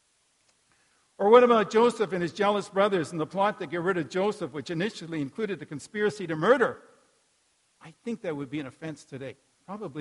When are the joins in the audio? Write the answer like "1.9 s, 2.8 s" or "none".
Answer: none